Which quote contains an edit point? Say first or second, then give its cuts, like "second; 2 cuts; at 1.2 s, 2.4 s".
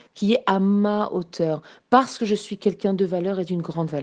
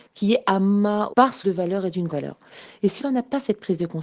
second; 4 cuts; at 1.1 s, 1.4 s, 2.1 s, 3.0 s